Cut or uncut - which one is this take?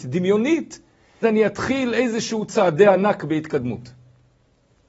cut